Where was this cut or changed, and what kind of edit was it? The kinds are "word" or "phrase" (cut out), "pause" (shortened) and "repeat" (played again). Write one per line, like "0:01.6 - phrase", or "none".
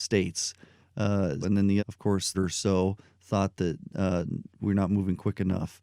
0:01.4 - word
0:01.8 - word
0:02.3 - word